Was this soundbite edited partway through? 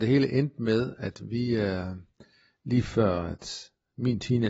no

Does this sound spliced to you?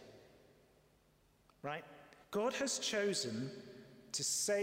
yes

